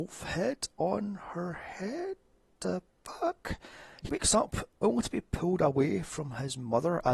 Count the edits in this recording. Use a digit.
2